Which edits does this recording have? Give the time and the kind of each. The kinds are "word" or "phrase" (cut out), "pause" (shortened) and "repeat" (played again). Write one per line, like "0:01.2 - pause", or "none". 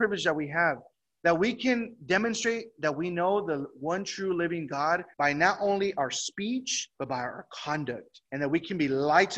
0:05.1 - pause
0:06.9 - pause
0:08.3 - pause

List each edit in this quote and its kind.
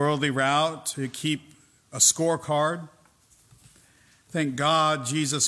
none

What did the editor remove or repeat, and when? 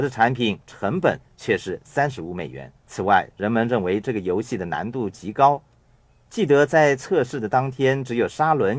0:02.8 - pause

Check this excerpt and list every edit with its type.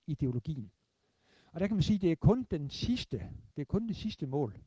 0:03.5 - pause

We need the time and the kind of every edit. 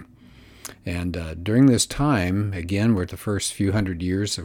0:03.1 - phrase

